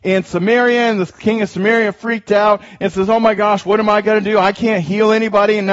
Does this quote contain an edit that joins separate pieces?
no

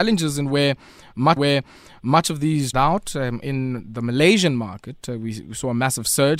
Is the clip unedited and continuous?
no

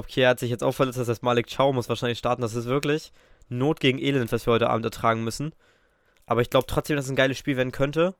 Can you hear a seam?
no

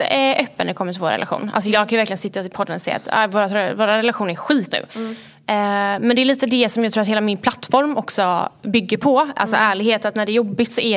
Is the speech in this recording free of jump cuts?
no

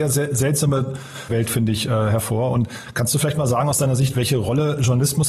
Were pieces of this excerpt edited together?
yes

